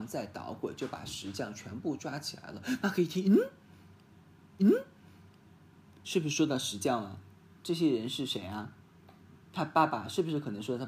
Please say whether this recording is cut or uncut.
cut